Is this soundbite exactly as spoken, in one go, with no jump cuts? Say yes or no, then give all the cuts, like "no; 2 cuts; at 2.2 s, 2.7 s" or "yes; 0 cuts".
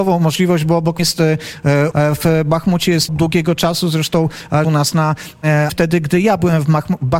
no; 5 cuts; at 1.0 s, 1.9 s, 3.1 s, 4.6 s, 5.7 s